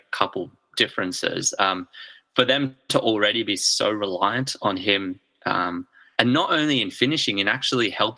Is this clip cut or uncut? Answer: uncut